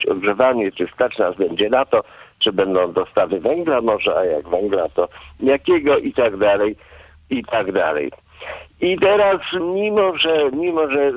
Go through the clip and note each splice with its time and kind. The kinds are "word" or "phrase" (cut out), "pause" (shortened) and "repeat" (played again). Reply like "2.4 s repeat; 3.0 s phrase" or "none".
9.6 s word